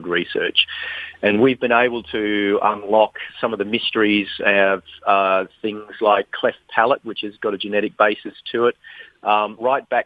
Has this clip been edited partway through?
no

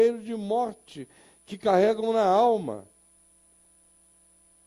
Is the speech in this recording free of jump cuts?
yes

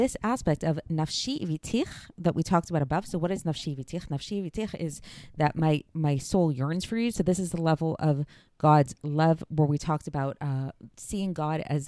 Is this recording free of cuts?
yes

